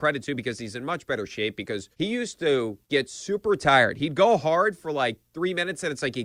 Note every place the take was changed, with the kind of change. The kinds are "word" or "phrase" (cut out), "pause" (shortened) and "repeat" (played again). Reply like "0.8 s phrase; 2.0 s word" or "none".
1.9 s pause; 2.8 s pause